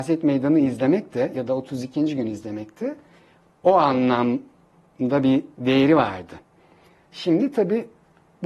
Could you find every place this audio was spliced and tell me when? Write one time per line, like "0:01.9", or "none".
none

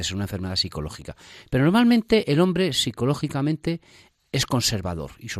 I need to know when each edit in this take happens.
none

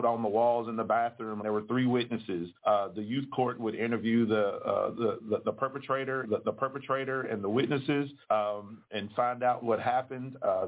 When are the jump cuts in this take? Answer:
0:01.4
0:02.6
0:06.2
0:08.2
0:09.6

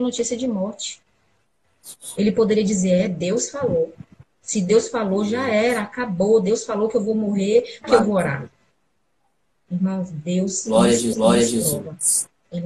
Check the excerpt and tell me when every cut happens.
0:07.8
0:11.1

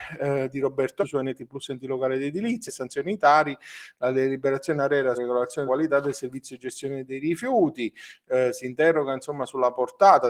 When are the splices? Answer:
0:01.0
0:02.7
0:05.1
0:05.7

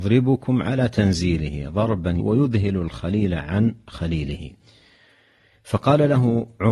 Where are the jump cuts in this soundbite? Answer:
0:02.2

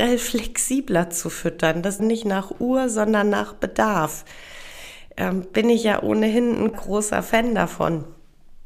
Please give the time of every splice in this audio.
0:02.0
0:06.7

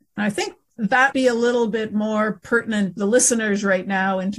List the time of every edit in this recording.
0:01.1
0:03.0

